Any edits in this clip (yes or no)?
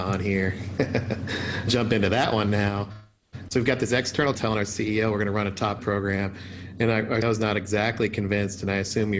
yes